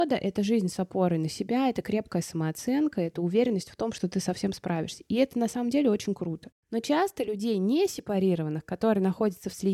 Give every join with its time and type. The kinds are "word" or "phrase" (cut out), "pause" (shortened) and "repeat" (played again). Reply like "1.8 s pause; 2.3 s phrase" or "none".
none